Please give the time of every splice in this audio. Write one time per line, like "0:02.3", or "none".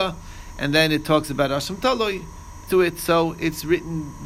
0:02.7